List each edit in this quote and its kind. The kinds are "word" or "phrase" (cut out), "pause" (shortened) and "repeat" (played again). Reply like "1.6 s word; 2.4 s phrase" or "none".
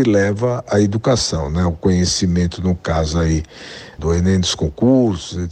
4.0 s word